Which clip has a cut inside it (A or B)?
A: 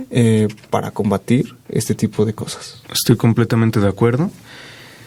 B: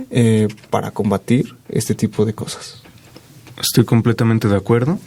A